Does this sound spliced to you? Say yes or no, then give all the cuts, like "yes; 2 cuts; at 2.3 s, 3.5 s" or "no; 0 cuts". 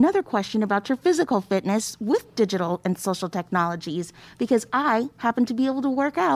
no; 0 cuts